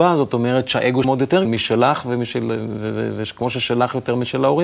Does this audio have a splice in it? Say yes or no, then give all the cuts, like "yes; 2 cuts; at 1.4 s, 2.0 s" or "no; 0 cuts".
yes; 2 cuts; at 1.0 s, 1.4 s